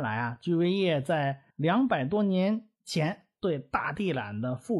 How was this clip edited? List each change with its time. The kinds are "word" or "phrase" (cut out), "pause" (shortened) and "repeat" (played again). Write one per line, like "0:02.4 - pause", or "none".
0:01.5 - pause
0:02.8 - pause